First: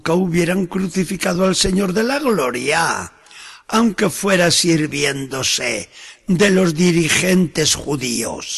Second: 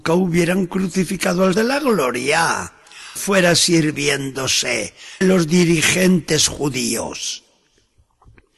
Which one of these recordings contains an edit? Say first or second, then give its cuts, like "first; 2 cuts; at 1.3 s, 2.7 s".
second; 3 cuts; at 1.5 s, 3.2 s, 5.2 s